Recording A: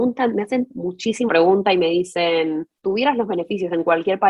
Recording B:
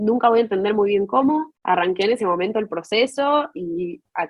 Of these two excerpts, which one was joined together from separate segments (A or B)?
A